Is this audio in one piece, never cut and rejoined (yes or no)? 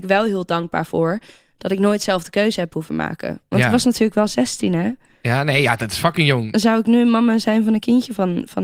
yes